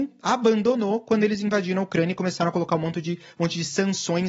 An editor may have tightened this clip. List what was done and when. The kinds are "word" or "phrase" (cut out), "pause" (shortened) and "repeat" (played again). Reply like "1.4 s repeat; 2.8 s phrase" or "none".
none